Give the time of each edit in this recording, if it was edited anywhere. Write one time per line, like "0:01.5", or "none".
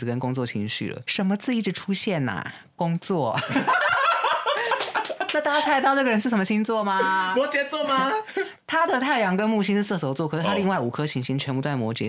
0:01.0